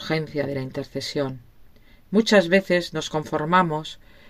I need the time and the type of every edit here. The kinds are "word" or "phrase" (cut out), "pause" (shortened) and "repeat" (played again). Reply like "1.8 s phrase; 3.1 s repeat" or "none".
none